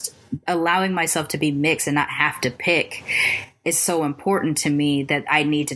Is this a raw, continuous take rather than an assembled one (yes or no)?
yes